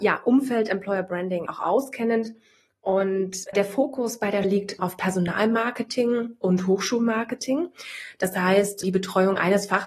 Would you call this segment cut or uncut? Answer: cut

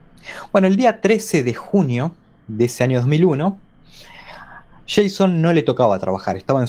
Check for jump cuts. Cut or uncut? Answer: uncut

